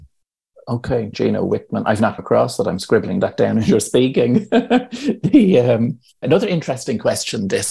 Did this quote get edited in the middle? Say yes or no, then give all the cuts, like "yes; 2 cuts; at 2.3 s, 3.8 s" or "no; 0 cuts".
yes; 2 cuts; at 2.2 s, 6.2 s